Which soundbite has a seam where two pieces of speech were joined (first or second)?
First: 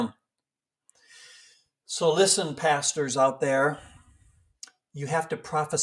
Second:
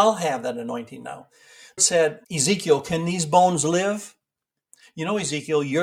second